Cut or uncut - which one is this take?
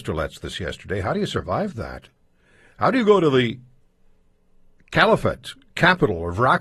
uncut